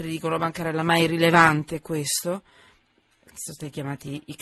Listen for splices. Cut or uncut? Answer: uncut